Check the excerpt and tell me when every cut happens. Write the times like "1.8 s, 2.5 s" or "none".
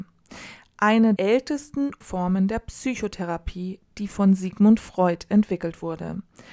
1.2 s, 2.0 s